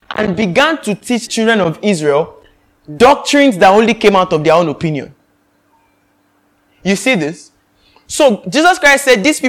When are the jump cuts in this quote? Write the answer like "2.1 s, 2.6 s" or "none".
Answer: 1.3 s